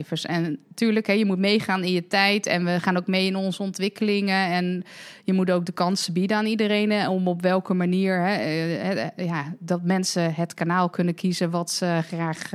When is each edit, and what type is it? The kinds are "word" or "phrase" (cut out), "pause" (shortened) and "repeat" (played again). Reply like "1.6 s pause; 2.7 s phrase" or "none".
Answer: none